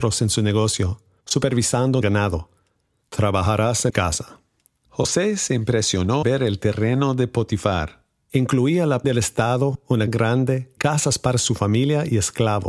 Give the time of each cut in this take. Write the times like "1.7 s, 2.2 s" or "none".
2.0 s, 3.9 s, 6.2 s, 9.0 s, 10.1 s, 10.8 s